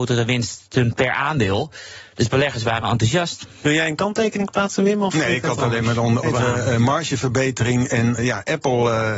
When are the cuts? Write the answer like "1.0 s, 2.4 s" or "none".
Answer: 6.2 s, 8.2 s